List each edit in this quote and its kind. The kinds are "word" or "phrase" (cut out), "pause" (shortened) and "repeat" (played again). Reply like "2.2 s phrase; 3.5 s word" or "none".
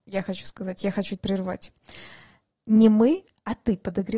1.2 s word

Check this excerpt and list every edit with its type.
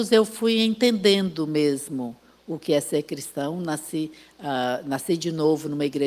none

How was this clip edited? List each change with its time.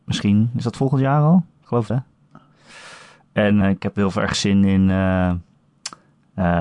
1.9 s word; 3.6 s word

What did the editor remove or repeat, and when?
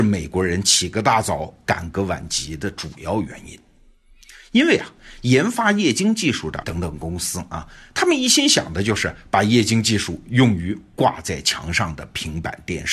6.6 s word

